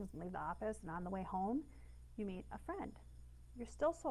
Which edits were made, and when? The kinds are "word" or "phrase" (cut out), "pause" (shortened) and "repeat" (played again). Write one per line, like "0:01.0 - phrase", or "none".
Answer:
none